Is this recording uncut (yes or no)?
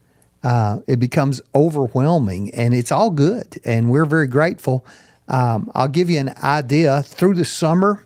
yes